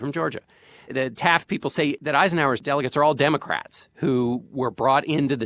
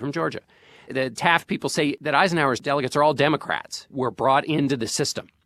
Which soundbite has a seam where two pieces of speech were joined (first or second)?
second